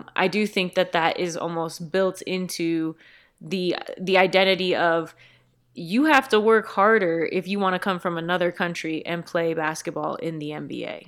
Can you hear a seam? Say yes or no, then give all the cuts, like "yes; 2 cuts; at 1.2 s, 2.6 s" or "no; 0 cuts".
no; 0 cuts